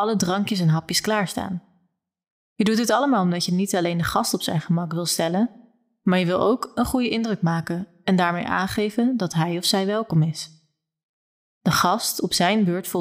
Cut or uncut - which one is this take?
uncut